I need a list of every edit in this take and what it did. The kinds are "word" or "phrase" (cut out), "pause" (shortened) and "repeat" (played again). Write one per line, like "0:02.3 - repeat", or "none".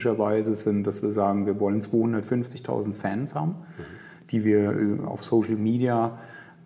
none